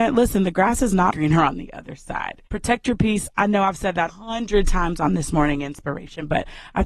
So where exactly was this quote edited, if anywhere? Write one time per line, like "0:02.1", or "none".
0:01.1
0:02.5
0:04.1